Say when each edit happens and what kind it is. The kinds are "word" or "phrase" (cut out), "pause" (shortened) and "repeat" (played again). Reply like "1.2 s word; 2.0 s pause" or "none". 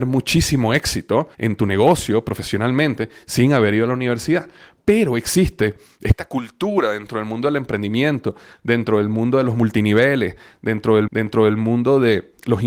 1.3 s pause; 11.1 s repeat